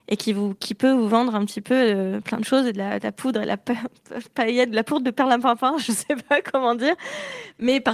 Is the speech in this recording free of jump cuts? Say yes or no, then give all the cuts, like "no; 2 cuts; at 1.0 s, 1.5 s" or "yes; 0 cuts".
yes; 0 cuts